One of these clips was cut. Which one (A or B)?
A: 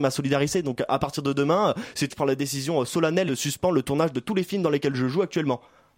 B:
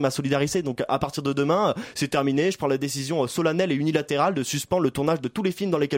A